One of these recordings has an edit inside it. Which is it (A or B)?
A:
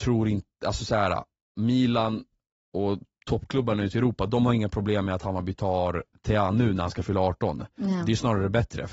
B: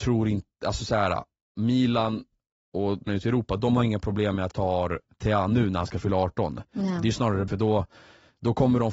B